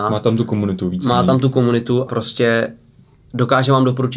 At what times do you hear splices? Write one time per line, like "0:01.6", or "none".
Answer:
0:02.1